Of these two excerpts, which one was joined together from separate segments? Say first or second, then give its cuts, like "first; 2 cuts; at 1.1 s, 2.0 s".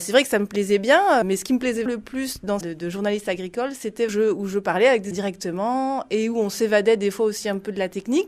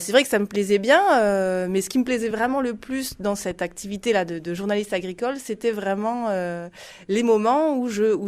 first; 5 cuts; at 1.2 s, 1.9 s, 2.6 s, 4.1 s, 5.1 s